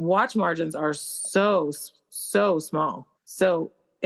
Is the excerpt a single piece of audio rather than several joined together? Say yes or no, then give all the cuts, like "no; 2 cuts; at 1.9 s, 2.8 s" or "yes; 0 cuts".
no; 1 cut; at 3.1 s